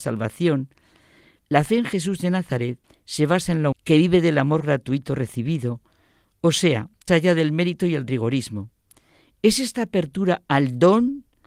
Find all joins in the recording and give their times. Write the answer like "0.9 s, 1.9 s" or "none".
2.8 s, 3.7 s, 7.1 s